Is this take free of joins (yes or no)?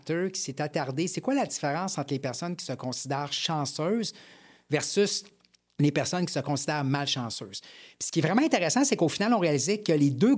yes